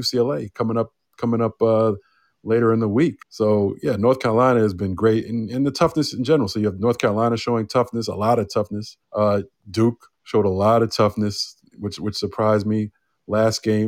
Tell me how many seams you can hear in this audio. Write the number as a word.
two